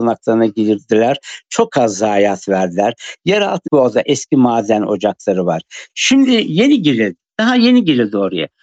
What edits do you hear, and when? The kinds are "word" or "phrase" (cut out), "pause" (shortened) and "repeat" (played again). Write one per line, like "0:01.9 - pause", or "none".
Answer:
0:03.7 - phrase